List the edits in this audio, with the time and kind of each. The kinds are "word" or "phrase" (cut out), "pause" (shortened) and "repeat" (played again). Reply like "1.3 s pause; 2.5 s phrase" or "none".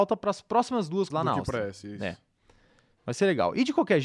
1.1 s word